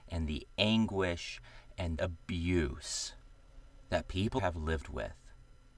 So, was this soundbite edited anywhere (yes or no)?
yes